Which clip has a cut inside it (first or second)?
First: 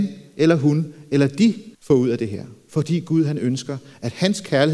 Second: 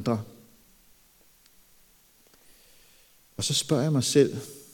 first